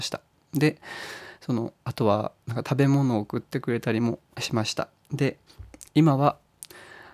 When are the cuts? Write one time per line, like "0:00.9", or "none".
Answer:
0:04.3